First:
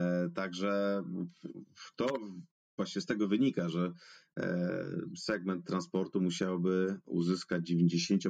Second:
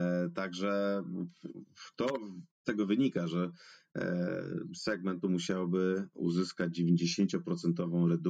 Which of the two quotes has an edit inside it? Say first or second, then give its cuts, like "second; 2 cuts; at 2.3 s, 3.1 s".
second; 2 cuts; at 2.6 s, 5.2 s